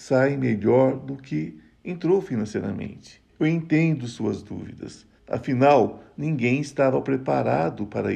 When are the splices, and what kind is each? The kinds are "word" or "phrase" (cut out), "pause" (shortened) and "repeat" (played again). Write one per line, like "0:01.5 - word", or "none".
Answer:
0:03.3 - pause
0:05.2 - pause